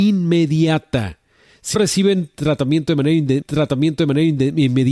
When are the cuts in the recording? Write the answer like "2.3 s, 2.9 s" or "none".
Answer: 1.7 s, 3.4 s